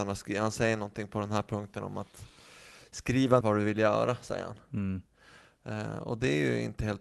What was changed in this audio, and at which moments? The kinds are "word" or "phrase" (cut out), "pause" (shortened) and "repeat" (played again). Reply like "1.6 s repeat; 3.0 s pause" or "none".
3.4 s word